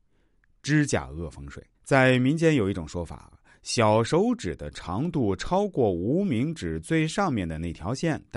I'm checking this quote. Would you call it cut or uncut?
cut